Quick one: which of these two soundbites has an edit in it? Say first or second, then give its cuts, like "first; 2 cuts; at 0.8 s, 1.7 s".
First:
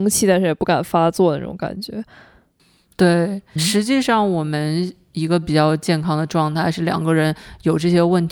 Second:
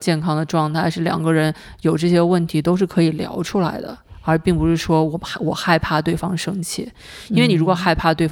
first; 1 cut; at 3.6 s